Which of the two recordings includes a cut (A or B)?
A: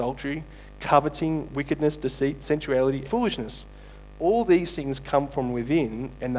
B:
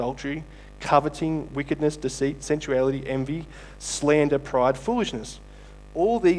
A